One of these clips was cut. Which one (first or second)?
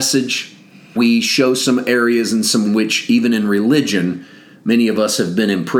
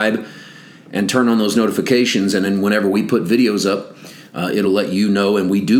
first